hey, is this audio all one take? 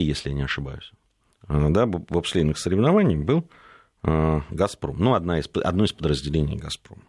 yes; 0 cuts

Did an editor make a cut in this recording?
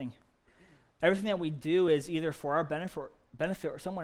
no; 0 cuts

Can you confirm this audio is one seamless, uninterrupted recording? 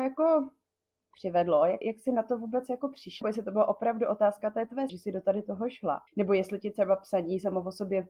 no; 4 cuts; at 1.8 s, 3.2 s, 4.9 s, 6.1 s

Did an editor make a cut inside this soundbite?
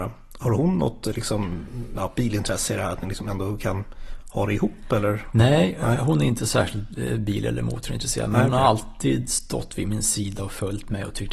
no; 0 cuts

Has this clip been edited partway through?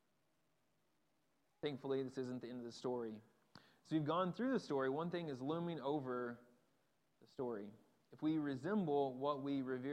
no; 0 cuts

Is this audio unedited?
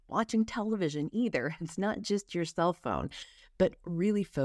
yes; 0 cuts

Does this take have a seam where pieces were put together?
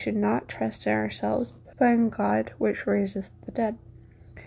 yes; 1 cut; at 1.7 s

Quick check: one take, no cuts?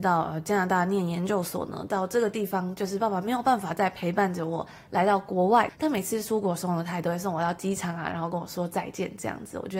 yes; 0 cuts

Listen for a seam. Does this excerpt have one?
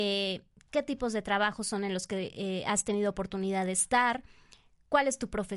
no; 0 cuts

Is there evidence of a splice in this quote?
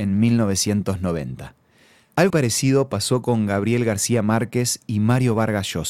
yes; 1 cut; at 2.3 s

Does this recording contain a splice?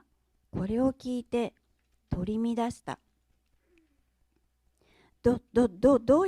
no; 0 cuts

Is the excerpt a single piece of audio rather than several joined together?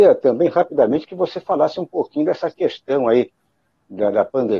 yes; 0 cuts

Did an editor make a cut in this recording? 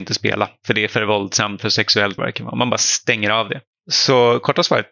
yes; 2 cuts; at 1.6 s, 2.2 s

